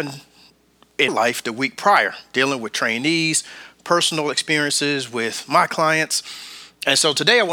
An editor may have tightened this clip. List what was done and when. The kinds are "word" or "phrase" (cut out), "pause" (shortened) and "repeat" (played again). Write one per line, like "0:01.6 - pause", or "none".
0:01.1 - word